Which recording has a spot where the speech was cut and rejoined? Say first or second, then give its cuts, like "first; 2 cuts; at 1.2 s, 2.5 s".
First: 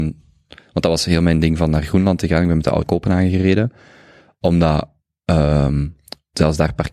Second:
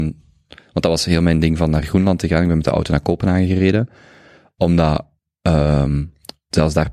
first; 1 cut; at 2.8 s